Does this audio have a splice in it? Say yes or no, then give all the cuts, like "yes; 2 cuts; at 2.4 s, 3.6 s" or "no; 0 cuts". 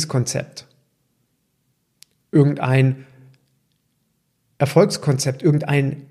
no; 0 cuts